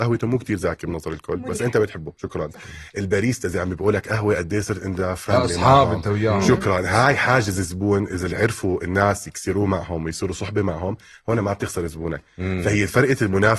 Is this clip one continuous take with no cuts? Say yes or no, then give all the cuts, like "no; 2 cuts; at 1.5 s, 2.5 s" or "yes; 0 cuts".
no; 1 cut; at 2.9 s